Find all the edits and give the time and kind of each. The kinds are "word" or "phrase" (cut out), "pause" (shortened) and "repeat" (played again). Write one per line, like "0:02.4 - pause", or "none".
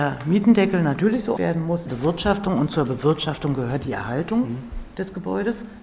0:01.4 - word
0:01.9 - phrase